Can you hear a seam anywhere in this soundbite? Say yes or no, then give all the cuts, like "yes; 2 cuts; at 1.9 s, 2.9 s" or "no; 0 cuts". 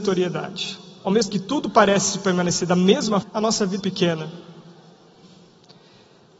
yes; 3 cuts; at 1.3 s, 3.2 s, 3.8 s